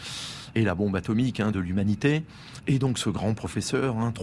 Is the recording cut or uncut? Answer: cut